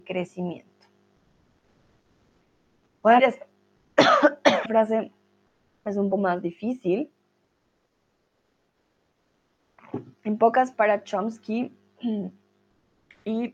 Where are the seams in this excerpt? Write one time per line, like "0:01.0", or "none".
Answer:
0:03.2
0:04.7
0:06.1
0:10.7